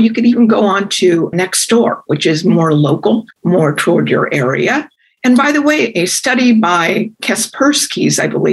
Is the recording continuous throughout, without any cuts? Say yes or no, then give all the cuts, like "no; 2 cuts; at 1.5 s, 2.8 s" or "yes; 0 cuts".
no; 1 cut; at 3.3 s